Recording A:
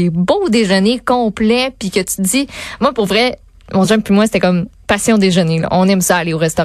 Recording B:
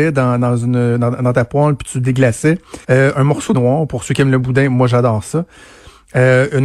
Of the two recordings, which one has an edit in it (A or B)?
B